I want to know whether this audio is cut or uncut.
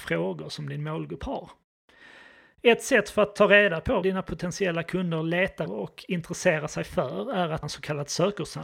cut